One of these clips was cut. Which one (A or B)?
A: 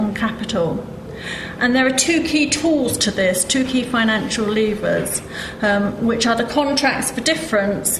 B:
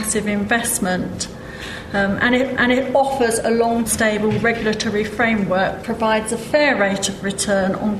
B